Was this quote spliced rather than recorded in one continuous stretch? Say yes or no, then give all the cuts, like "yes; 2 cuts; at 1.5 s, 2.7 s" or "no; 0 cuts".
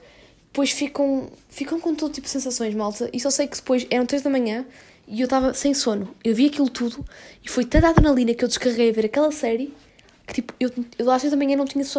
no; 0 cuts